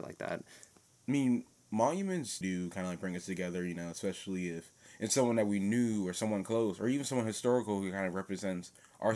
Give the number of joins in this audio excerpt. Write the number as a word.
one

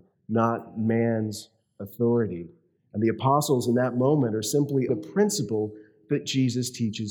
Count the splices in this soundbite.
one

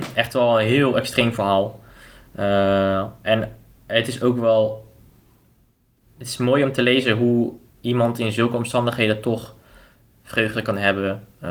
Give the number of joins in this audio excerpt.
zero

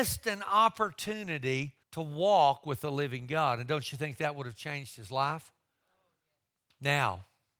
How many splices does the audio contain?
one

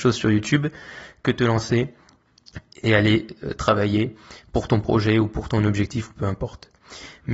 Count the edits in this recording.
zero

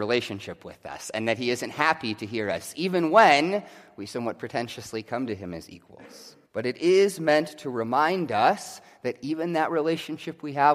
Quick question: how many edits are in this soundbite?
one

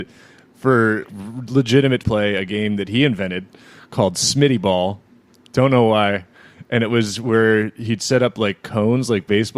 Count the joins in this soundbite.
two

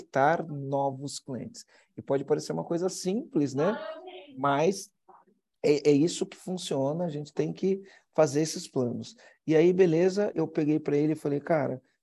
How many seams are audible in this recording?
one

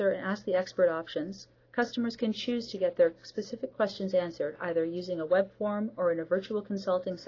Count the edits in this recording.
zero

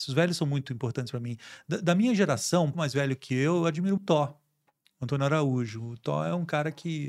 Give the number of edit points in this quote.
two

